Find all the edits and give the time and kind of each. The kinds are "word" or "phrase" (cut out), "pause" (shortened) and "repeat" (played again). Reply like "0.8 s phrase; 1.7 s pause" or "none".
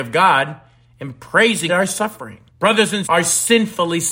1.7 s phrase; 2.5 s pause; 3.0 s word